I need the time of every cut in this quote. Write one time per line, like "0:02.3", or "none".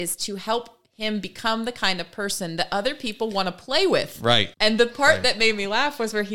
0:04.5